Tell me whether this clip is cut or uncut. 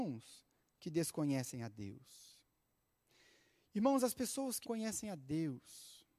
cut